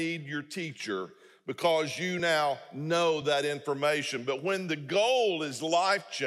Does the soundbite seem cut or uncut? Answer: uncut